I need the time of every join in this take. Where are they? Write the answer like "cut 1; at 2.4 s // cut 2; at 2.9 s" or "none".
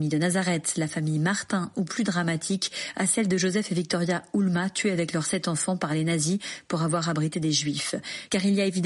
none